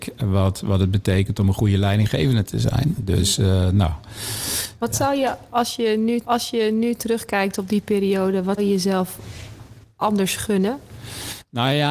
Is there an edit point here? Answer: yes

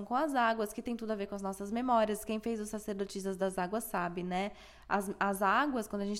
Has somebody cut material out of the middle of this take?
no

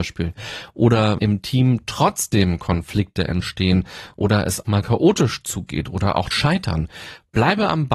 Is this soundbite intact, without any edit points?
no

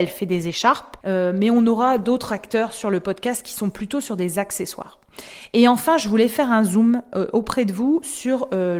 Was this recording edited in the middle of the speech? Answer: no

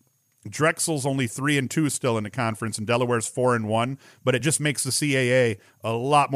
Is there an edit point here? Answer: no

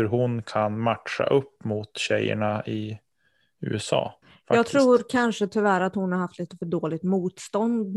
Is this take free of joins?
no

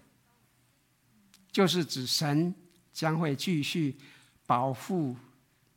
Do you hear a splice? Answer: no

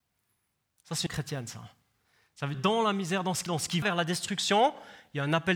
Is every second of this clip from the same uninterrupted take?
no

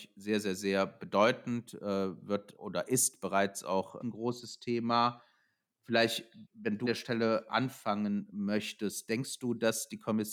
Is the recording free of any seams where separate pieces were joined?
no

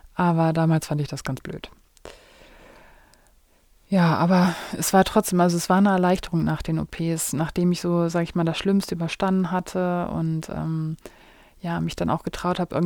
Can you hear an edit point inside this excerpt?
no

